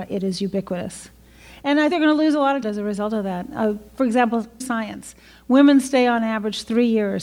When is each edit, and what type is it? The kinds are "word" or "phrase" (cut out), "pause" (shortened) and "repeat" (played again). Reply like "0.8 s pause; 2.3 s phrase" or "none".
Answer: 1.9 s word; 2.6 s word; 4.6 s word